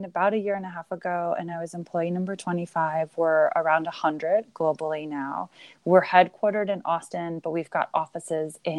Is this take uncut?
yes; 0 cuts

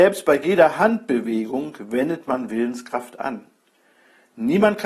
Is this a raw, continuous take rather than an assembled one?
yes; 0 cuts

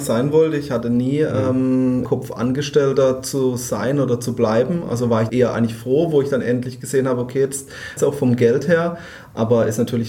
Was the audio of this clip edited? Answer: yes; 3 cuts; at 2.1 s, 5.3 s, 8.0 s

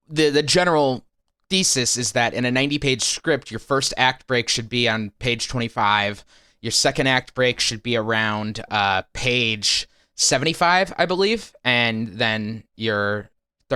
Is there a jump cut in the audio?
no; 0 cuts

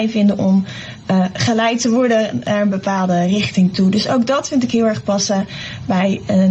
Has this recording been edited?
no; 0 cuts

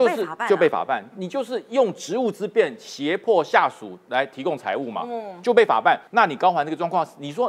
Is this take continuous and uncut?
no; 1 cut; at 6.1 s

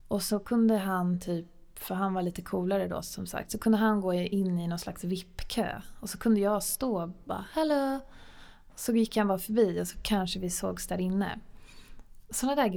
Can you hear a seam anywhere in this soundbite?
no; 0 cuts

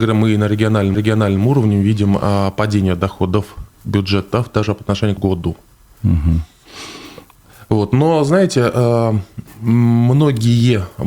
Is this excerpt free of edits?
no; 3 cuts; at 0.9 s, 5.2 s, 9.5 s

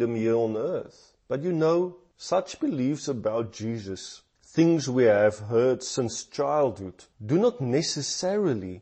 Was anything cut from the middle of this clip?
yes; 1 cut; at 7.1 s

